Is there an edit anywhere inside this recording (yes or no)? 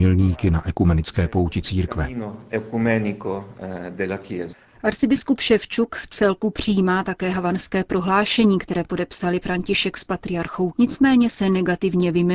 yes